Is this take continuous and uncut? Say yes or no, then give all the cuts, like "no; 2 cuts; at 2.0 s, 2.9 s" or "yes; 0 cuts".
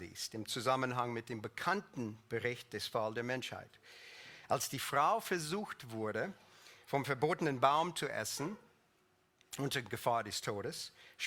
yes; 0 cuts